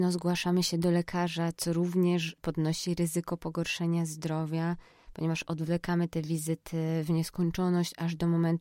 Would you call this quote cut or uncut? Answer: uncut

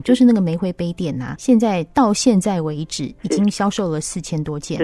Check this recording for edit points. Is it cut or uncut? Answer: cut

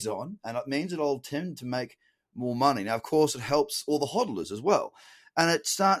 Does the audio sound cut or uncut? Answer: uncut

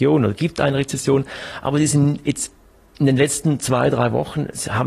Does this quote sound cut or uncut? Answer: uncut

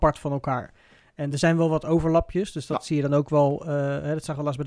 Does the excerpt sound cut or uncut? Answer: uncut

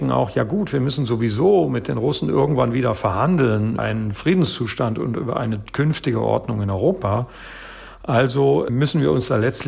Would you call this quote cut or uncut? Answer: cut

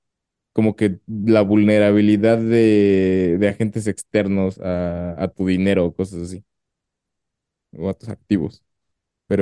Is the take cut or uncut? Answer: uncut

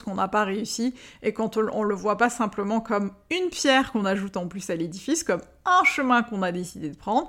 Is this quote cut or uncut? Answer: uncut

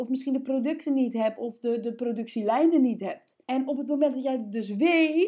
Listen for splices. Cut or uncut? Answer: cut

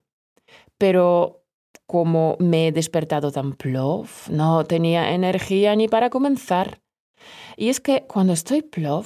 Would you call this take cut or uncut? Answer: uncut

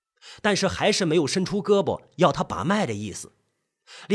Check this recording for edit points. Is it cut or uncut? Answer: uncut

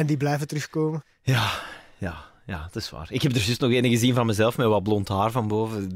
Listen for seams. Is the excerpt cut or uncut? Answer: uncut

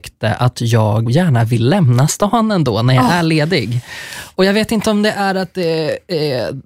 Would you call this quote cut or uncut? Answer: cut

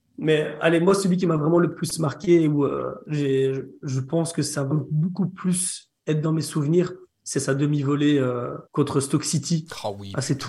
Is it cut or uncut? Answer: cut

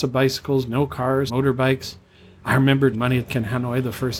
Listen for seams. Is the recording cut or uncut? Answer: cut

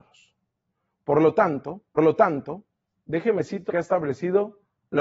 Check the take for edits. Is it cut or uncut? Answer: cut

